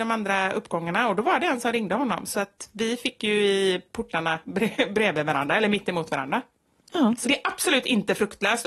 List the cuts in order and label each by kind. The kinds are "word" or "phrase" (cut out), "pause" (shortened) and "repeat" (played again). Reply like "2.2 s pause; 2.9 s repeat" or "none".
7.2 s word